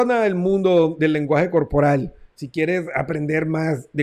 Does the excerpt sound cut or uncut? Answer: uncut